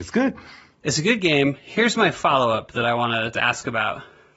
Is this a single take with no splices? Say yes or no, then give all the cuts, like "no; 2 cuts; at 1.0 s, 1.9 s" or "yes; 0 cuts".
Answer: no; 1 cut; at 3.3 s